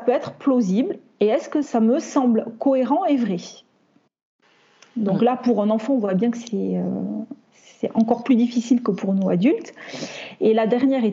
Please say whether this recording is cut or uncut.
uncut